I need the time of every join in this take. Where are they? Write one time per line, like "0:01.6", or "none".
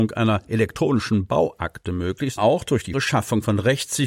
0:02.4
0:02.9

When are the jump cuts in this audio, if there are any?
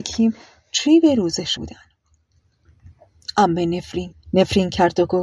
0:01.6
0:04.1

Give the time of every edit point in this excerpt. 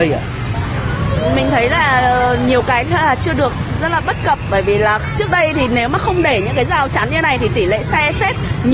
none

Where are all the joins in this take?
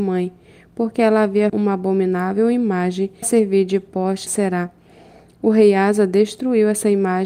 0:01.5
0:03.2
0:04.3

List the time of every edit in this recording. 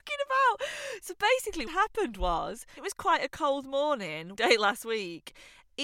0:01.7
0:02.8
0:04.3

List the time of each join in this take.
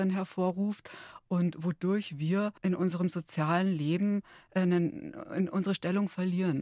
0:02.6

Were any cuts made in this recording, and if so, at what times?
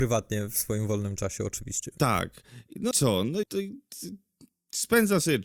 0:02.9
0:03.4

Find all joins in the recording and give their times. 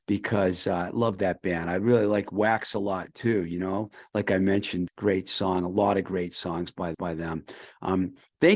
0:04.9
0:06.9

